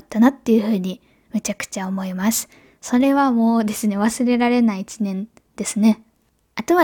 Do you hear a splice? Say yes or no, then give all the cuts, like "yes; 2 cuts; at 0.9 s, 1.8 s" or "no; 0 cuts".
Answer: no; 0 cuts